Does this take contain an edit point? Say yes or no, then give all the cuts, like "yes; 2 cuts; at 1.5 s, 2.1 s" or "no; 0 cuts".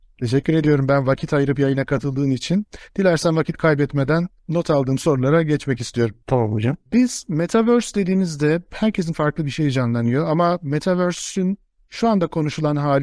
yes; 3 cuts; at 6.2 s, 6.9 s, 9.1 s